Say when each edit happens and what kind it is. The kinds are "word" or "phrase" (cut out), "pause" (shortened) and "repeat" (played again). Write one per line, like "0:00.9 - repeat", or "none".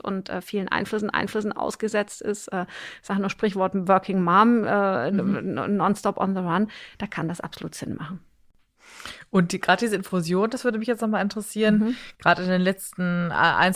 0:01.1 - repeat